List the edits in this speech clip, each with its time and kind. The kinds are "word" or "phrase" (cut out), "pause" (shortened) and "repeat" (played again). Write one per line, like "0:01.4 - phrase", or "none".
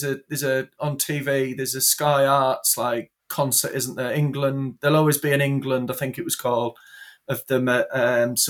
0:03.2 - pause